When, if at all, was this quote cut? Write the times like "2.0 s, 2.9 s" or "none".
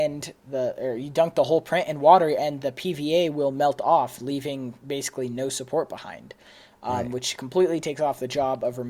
none